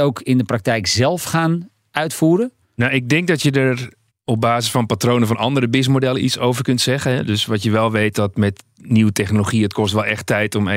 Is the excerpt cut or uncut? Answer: cut